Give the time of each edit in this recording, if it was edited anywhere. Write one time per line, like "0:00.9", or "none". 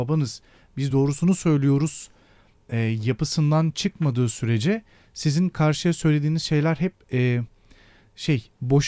none

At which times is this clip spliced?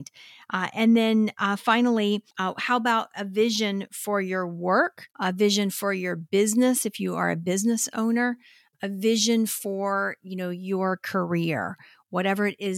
0:02.3
0:05.1

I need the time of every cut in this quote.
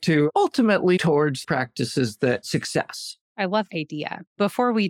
0:01.0
0:01.4
0:02.4
0:03.7

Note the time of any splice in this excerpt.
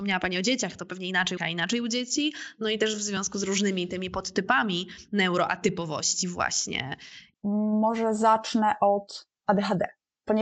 0:01.4
0:09.3

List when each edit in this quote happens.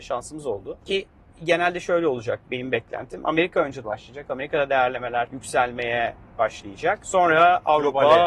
0:03.8

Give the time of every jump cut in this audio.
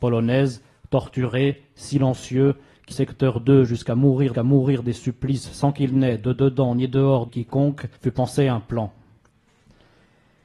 0:02.9
0:04.3
0:07.3
0:08.0

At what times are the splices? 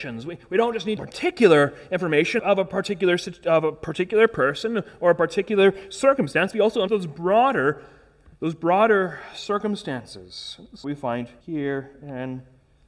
0:01.0
0:02.4
0:06.9
0:08.4
0:10.8
0:11.4

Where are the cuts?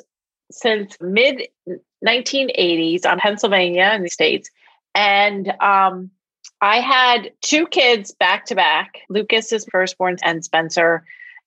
0:01.0
0:03.2
0:04.1
0:06.5
0:07.4
0:09.0
0:09.7
0:10.2

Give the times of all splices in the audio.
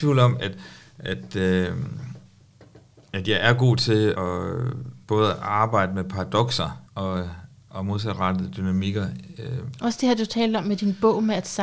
0:04.2
0:05.0
0:06.9

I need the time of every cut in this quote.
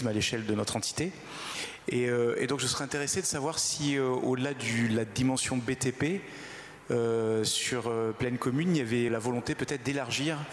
0:09.1

